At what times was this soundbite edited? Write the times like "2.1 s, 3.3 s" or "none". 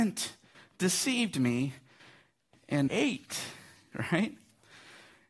2.9 s